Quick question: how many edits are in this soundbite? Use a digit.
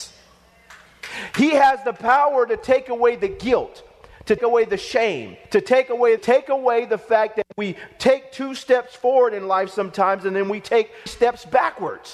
4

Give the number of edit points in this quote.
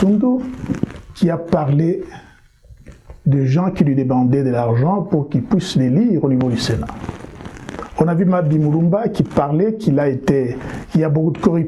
0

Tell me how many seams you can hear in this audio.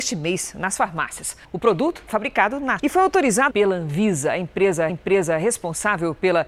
5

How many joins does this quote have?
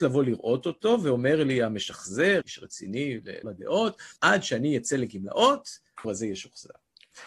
4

